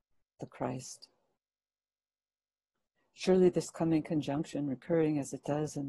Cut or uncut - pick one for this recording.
uncut